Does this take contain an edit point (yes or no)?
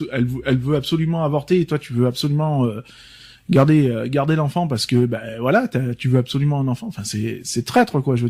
no